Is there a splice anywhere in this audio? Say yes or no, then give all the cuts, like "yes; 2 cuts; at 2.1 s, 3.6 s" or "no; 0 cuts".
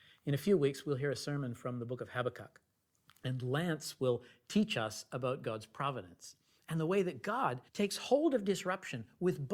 yes; 1 cut; at 7.7 s